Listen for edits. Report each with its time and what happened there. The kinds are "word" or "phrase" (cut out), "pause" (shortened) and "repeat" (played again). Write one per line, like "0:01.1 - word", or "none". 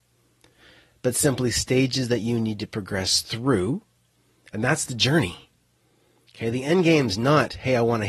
none